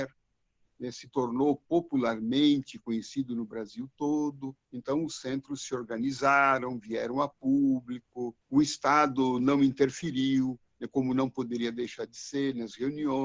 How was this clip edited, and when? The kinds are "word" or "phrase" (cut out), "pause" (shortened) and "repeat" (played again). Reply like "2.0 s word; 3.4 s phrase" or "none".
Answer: 4.6 s pause; 8.4 s pause; 10.7 s pause